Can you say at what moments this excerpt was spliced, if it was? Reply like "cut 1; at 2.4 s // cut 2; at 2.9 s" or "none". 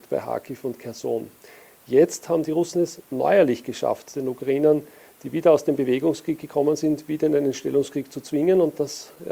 none

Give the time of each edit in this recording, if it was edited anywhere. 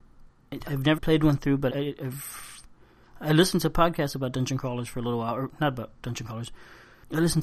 cut 1; at 1.0 s // cut 2; at 1.7 s

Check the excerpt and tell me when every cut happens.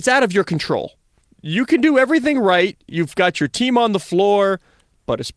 cut 1; at 1.2 s

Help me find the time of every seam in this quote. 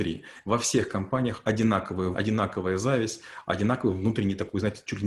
cut 1; at 2.1 s

